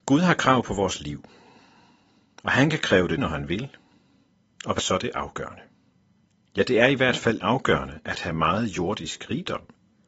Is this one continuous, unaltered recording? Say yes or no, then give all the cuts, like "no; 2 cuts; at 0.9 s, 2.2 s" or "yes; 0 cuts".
no; 3 cuts; at 3.2 s, 4.8 s, 7.4 s